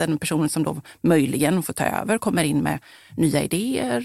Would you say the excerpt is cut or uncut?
uncut